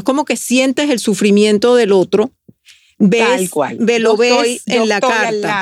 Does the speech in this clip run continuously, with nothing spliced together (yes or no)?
yes